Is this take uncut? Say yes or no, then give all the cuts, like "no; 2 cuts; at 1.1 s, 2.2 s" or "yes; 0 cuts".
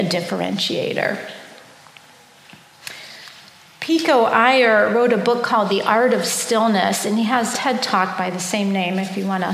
no; 1 cut; at 7.5 s